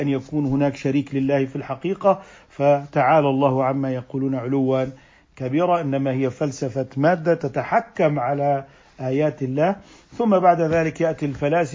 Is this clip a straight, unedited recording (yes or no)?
yes